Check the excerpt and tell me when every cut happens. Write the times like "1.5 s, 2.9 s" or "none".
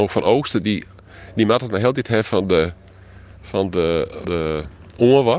4.2 s